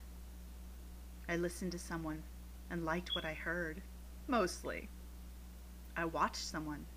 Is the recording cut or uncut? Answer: uncut